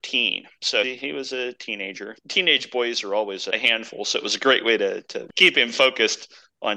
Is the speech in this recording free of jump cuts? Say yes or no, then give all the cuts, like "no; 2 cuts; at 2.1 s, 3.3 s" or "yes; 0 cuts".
yes; 0 cuts